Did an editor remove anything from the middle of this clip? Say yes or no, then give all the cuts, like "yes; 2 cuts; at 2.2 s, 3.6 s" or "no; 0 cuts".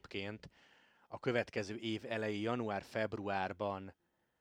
no; 0 cuts